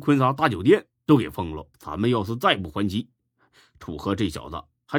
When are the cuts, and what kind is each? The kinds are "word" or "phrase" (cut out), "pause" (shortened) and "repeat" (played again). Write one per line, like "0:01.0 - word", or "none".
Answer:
0:01.7 - pause